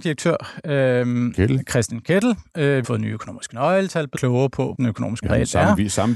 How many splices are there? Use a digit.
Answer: 5